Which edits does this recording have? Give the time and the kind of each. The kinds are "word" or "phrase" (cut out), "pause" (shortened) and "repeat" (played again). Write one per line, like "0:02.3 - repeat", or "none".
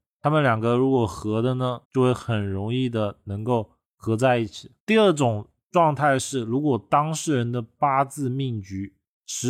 0:01.8 - pause
0:04.8 - pause

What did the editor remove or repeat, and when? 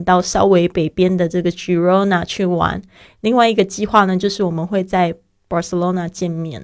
none

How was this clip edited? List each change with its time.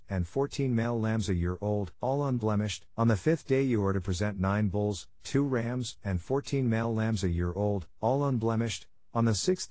0:02.0 - pause
0:02.9 - pause
0:08.0 - pause

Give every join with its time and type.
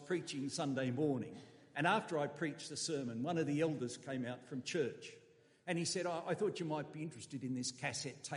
none

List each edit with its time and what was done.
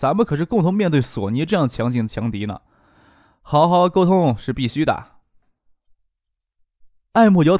none

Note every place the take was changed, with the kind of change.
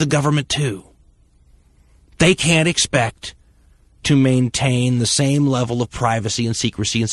none

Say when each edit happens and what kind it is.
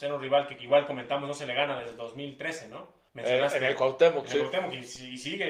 0:03.1 - pause

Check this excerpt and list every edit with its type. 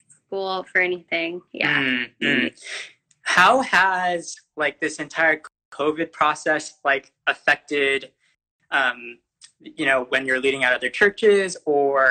none

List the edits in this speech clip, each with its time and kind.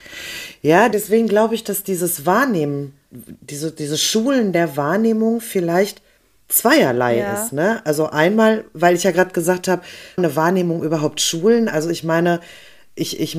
0:00.9 - word
0:06.2 - pause
0:10.2 - phrase

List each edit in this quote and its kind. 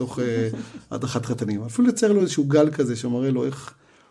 none

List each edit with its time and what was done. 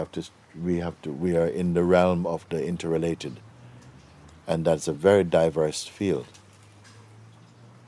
none

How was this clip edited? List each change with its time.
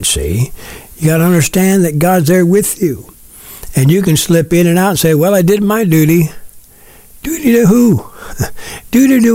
none

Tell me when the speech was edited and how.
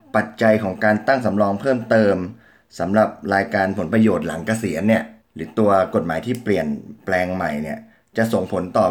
0:05.2 - pause

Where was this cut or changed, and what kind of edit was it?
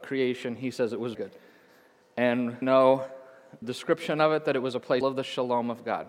0:01.1 - word
0:02.6 - word
0:03.6 - word
0:05.0 - word

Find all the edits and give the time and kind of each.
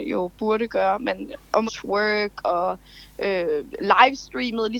0:01.7 - phrase

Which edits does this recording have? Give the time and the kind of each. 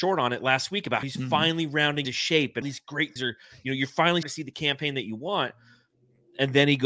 0:01.0 - word
0:02.0 - word
0:02.6 - word
0:03.2 - word
0:04.2 - word

